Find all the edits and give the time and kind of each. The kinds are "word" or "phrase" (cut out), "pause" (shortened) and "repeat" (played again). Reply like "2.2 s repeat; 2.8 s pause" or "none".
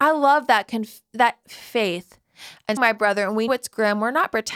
1.4 s word; 2.8 s word; 3.5 s word